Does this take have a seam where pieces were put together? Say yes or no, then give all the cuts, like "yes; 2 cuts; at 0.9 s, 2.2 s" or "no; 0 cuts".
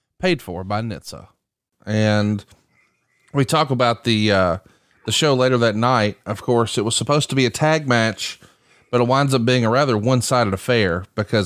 no; 0 cuts